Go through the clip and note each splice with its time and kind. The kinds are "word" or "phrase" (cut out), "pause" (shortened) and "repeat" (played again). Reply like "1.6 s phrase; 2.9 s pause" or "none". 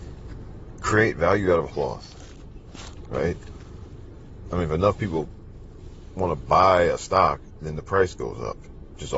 1.7 s word